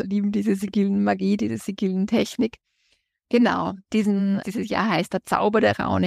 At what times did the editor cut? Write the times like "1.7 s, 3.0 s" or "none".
3.9 s, 4.4 s

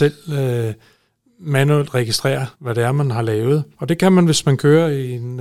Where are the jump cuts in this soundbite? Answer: 2.5 s, 3.7 s

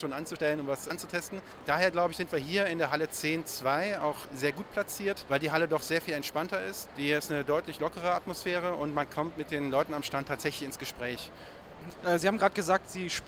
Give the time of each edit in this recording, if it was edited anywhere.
none

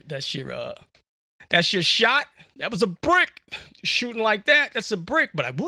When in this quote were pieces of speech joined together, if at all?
none

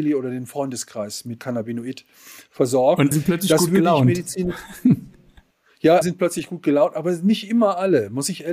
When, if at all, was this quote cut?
1.4 s, 3.1 s, 6.0 s

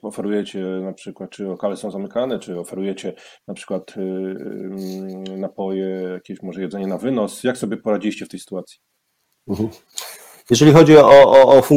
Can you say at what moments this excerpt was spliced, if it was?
none

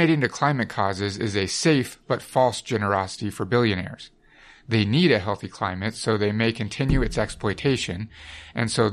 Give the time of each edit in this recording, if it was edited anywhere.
none

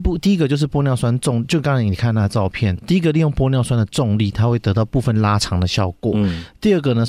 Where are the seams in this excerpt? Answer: 2.8 s

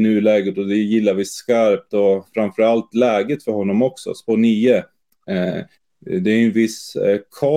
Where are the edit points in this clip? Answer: 5.8 s

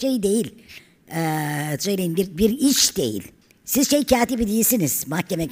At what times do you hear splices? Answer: 3.4 s

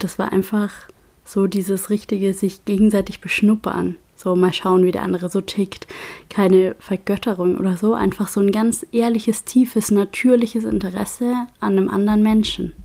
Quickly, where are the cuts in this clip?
none

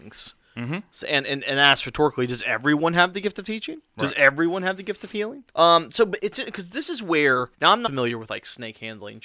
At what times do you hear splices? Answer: 5.5 s, 6.2 s, 7.5 s, 7.9 s

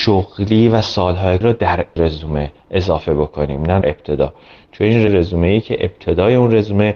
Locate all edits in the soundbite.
1.4 s, 2.0 s, 3.8 s, 5.1 s

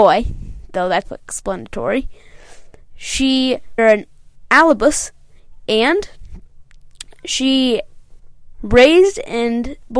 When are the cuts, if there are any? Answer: 1.0 s, 3.8 s, 8.5 s

